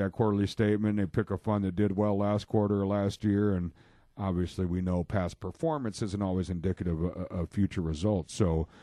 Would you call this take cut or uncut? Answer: uncut